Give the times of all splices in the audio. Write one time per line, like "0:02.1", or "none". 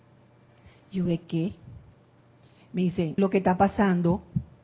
0:01.1
0:03.2